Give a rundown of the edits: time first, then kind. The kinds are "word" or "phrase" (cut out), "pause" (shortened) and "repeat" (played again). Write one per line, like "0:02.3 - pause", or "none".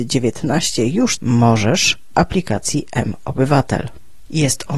0:01.2 - word
0:02.1 - phrase